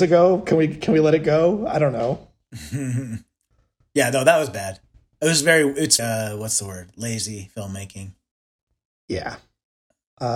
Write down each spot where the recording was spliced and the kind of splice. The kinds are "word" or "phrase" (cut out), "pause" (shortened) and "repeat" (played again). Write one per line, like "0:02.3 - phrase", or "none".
0:06.0 - word